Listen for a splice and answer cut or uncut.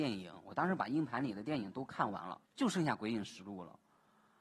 cut